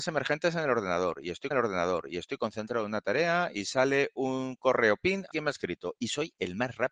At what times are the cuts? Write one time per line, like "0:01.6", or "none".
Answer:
0:01.5
0:05.3